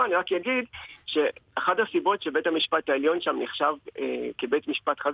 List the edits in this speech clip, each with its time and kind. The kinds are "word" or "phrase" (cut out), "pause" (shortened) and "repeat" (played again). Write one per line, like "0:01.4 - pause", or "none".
none